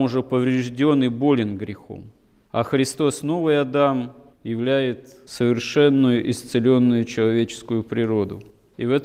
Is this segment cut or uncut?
uncut